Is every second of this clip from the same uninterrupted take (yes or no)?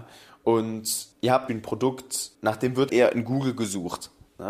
no